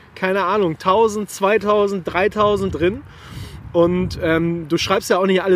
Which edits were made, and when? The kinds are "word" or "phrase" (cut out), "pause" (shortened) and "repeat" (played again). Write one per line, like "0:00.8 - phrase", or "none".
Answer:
0:02.7 - phrase